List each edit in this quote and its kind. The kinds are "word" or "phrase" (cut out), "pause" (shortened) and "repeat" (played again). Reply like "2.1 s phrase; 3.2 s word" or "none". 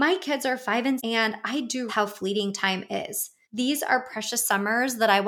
1.0 s word; 1.9 s word; 3.4 s pause